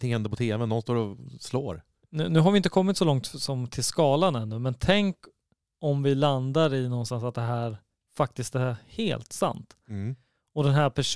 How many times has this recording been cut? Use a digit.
0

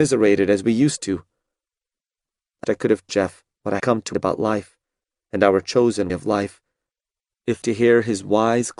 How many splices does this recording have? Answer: 6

